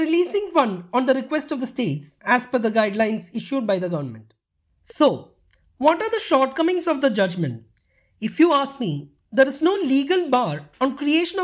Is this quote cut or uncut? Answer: uncut